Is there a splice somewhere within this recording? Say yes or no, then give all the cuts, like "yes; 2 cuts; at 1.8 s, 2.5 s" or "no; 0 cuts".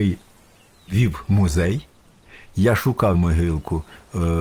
yes; 1 cut; at 3.1 s